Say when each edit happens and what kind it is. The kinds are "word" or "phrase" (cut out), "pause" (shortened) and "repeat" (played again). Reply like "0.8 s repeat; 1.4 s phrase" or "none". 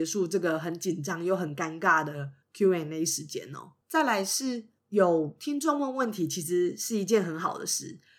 2.4 s pause; 3.8 s pause; 4.8 s pause

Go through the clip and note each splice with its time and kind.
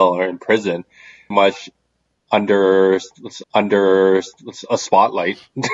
1.3 s word; 3.4 s repeat

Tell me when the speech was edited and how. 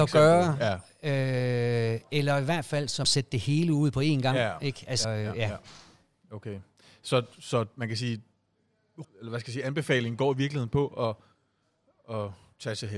3.0 s word; 5.0 s word; 9.0 s word

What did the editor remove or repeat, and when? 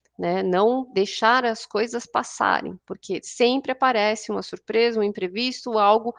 none

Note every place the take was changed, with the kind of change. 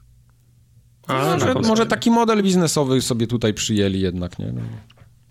none

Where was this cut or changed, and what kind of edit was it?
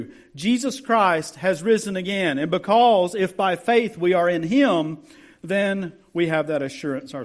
none

